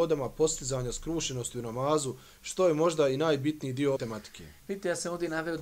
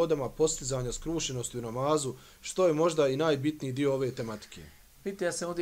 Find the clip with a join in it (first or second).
first